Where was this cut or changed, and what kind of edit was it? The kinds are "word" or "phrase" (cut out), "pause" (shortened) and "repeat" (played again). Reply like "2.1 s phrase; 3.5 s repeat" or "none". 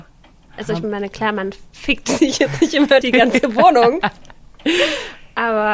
3.0 s word